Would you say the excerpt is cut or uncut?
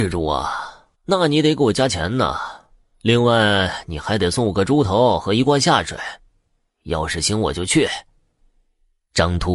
cut